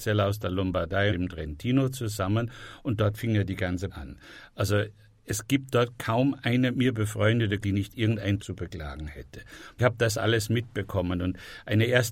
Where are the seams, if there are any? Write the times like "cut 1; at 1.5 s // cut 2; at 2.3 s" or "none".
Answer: cut 1; at 1.1 s // cut 2; at 3.9 s // cut 3; at 6.7 s // cut 4; at 7.6 s // cut 5; at 8.4 s // cut 6; at 9.8 s